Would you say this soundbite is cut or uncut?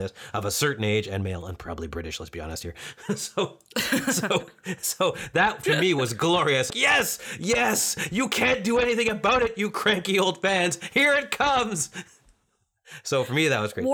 cut